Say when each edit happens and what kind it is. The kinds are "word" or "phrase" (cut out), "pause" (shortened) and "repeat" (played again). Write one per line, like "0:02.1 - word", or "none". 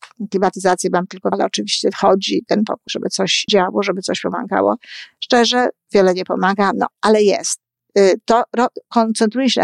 0:01.3 - phrase
0:02.9 - phrase
0:03.5 - word
0:06.9 - word